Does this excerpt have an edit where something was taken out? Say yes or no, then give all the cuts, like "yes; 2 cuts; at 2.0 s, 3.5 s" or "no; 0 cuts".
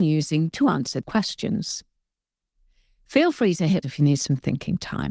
yes; 2 cuts; at 1.0 s, 3.8 s